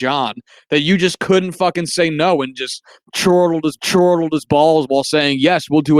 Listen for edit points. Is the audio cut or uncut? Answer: cut